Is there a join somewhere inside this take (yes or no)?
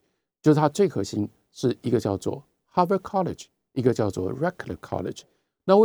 no